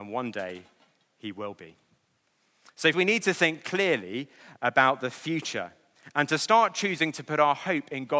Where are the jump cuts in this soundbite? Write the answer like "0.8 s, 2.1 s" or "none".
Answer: 2.9 s